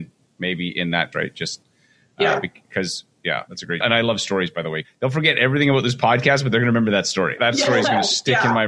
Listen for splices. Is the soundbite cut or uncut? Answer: cut